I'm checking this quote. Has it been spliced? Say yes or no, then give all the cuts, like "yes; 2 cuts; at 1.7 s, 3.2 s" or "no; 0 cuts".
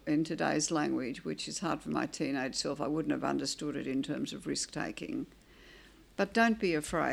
no; 0 cuts